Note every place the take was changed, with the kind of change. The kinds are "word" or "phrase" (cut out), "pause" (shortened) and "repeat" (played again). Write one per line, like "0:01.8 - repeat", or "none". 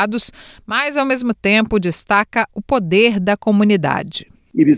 none

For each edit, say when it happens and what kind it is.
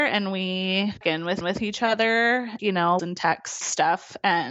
0:01.0 - word
0:01.4 - repeat
0:02.6 - word
0:03.0 - phrase
0:03.6 - word

